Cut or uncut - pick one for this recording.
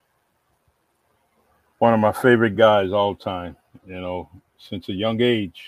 uncut